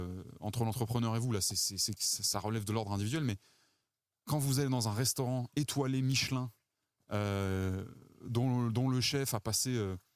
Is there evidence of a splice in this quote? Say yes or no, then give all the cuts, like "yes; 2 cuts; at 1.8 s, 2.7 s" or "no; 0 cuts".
no; 0 cuts